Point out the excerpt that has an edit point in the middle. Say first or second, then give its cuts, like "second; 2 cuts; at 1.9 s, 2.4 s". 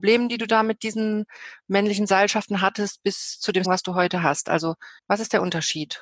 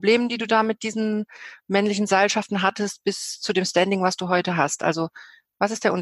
first; 2 cuts; at 3.6 s, 5.0 s